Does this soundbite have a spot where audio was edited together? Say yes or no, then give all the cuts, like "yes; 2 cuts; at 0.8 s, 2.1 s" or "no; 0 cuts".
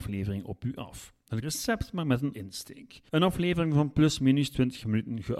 yes; 3 cuts; at 1.4 s, 2.3 s, 3.1 s